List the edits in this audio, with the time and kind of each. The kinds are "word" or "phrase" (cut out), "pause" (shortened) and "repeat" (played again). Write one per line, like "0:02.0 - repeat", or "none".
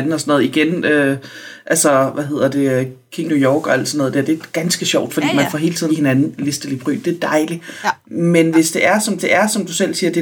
0:03.3 - word
0:05.1 - word
0:05.9 - phrase
0:09.2 - repeat